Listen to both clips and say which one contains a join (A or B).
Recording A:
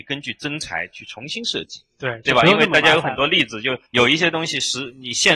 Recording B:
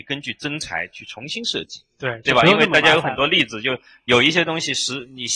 A